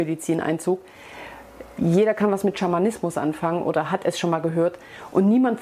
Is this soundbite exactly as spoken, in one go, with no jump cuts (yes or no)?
yes